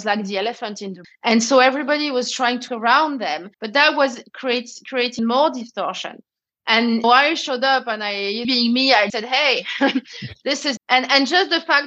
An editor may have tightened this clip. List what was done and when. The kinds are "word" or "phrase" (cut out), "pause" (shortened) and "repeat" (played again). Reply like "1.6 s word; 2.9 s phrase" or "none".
1.0 s word; 2.7 s word; 3.5 s pause; 5.2 s word; 7.0 s phrase; 8.4 s phrase; 9.1 s word; 10.8 s word